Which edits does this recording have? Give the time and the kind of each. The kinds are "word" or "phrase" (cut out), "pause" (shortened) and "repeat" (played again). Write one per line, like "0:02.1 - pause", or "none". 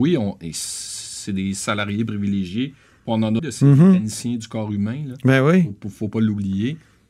0:03.4 - word